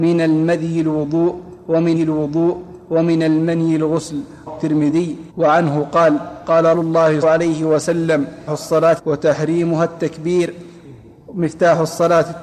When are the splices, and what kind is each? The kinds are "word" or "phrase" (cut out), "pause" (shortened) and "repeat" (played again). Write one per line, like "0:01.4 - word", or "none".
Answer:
0:02.0 - repeat
0:04.5 - word
0:05.3 - pause
0:06.7 - word
0:07.2 - phrase
0:08.5 - phrase
0:09.0 - word